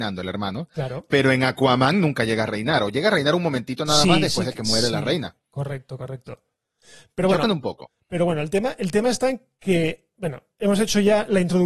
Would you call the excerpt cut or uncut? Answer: uncut